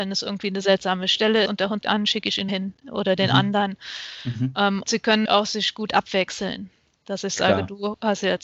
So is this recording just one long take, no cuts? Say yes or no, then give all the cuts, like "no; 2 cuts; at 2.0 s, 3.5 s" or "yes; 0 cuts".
no; 5 cuts; at 1.5 s, 1.8 s, 2.5 s, 4.9 s, 5.2 s